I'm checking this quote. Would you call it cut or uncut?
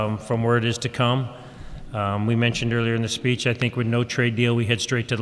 uncut